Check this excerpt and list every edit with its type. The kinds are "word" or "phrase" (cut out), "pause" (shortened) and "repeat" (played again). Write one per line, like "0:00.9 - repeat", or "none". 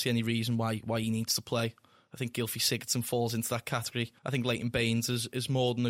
0:04.2 - pause